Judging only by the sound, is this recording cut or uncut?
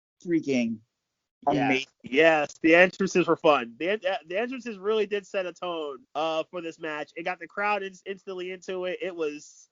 cut